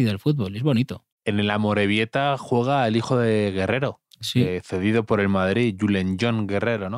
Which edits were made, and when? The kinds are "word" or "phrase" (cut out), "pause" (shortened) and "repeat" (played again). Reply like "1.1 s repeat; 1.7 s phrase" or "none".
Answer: 1.1 s pause; 4.1 s pause